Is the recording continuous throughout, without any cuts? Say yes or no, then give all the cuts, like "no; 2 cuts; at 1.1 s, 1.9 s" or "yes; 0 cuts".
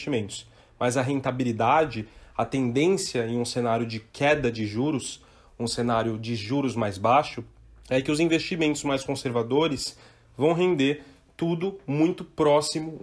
yes; 0 cuts